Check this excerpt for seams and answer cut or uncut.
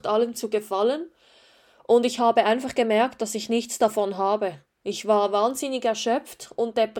uncut